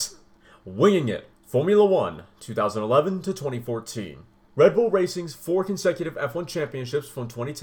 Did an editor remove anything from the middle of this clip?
yes; 1 cut; at 1.3 s

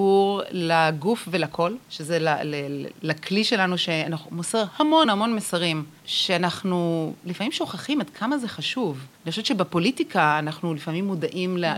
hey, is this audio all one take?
no; 4 cuts; at 1.8 s, 2.9 s, 5.0 s, 9.1 s

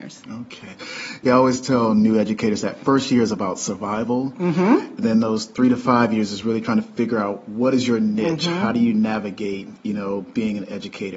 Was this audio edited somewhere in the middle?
no; 0 cuts

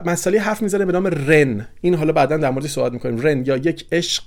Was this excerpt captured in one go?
yes; 0 cuts

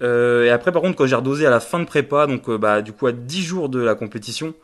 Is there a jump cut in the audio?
no; 0 cuts

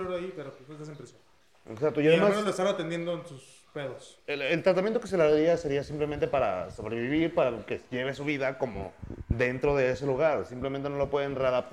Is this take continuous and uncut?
yes; 0 cuts

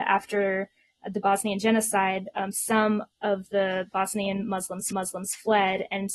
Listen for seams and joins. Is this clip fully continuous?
no; 1 cut; at 4.9 s

